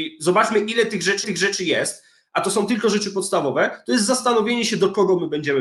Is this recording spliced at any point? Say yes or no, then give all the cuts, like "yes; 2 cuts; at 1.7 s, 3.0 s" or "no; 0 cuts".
yes; 1 cut; at 1.2 s